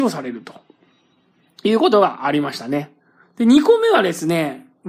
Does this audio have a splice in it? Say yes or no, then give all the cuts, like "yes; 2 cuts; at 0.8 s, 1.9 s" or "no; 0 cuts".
yes; 1 cut; at 3.2 s